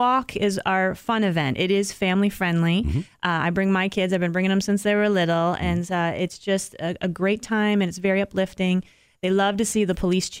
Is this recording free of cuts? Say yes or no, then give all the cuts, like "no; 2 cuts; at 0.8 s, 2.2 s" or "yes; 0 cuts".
yes; 0 cuts